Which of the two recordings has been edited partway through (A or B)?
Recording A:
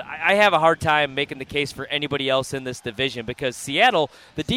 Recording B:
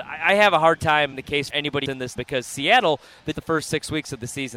B